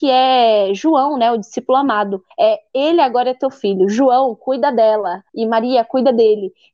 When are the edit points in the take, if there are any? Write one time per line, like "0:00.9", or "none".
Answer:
0:02.3
0:05.3